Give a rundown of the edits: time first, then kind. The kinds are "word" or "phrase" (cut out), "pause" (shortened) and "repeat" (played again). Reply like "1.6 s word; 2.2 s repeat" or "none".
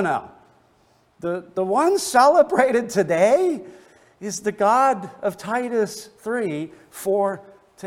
none